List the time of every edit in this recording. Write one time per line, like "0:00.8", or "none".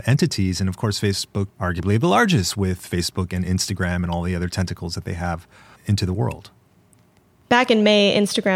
0:01.5
0:05.8